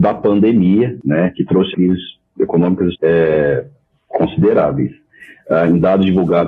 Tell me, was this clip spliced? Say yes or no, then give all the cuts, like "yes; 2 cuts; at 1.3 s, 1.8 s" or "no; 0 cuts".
yes; 2 cuts; at 1.7 s, 2.9 s